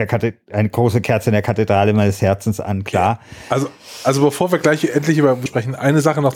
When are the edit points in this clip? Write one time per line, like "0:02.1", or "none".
0:05.5

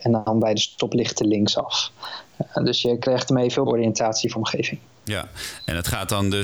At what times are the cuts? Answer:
0:03.7
0:04.4

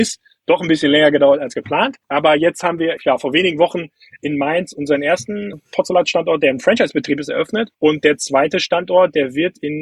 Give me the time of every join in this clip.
0:02.0
0:03.0
0:05.5
0:07.7

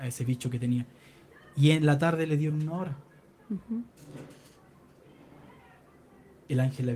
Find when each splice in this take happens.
none

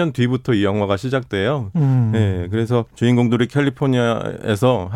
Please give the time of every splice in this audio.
0:02.9

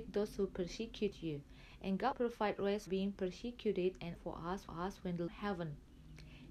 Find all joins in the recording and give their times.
0:02.1
0:02.9
0:04.2
0:04.7
0:05.3

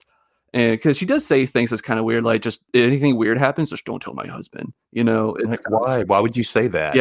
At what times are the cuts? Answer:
none

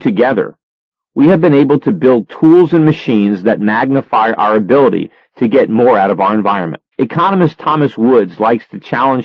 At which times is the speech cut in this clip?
0:06.9

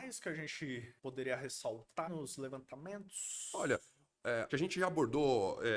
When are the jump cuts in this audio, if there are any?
0:01.0
0:02.1
0:04.5

